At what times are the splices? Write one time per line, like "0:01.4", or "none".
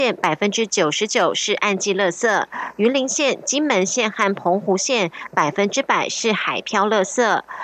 none